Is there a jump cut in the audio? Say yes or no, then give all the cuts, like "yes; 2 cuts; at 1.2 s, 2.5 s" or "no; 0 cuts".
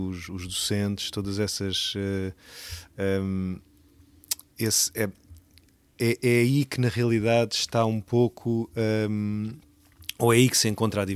no; 0 cuts